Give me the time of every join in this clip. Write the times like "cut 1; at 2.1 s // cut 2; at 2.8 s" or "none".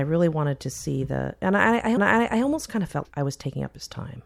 cut 1; at 2.0 s // cut 2; at 3.0 s